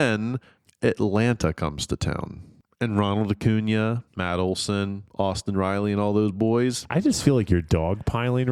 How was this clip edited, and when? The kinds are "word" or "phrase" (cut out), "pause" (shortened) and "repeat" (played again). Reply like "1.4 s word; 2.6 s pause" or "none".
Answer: 4.1 s pause; 5.1 s phrase

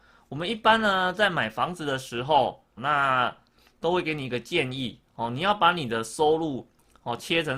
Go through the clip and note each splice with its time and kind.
2.8 s word

